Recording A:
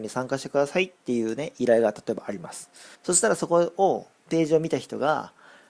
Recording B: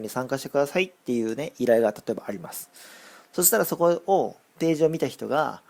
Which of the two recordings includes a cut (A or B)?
A